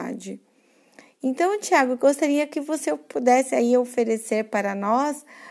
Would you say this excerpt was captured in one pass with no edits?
yes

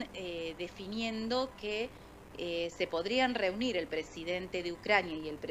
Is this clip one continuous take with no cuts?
yes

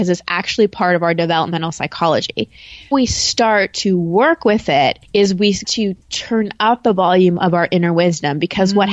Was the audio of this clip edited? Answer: yes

